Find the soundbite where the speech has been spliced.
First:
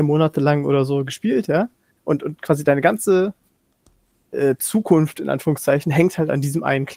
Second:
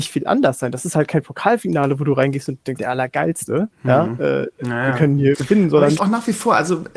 second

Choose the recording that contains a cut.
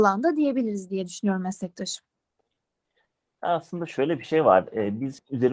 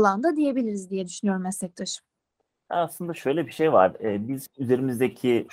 second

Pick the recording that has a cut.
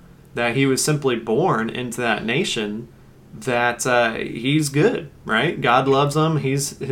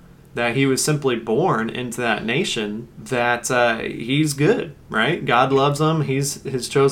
second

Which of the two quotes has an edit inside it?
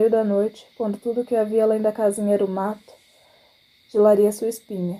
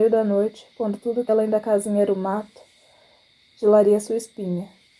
second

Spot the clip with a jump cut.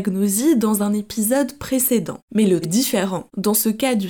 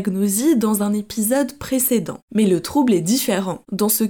first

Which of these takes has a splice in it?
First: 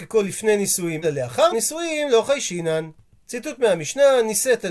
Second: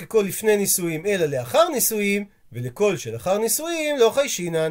first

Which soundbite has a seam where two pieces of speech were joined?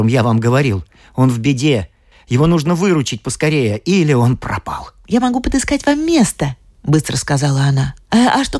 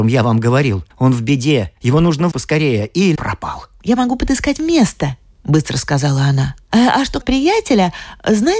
second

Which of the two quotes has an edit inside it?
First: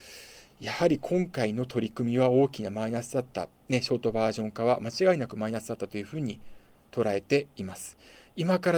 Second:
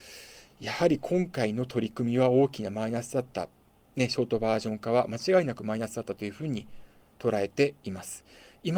first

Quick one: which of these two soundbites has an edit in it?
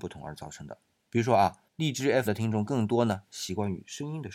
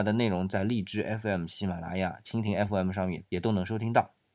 first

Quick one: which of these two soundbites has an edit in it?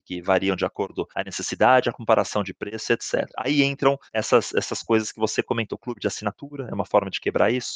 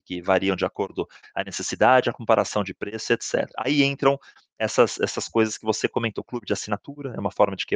first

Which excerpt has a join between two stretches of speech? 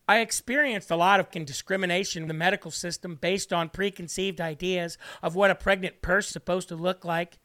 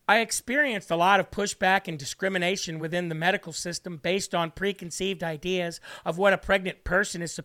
first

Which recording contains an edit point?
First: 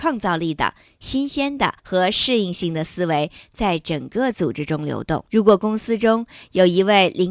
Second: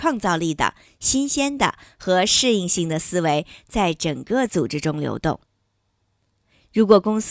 first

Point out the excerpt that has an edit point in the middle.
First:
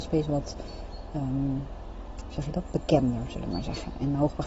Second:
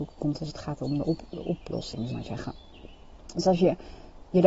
second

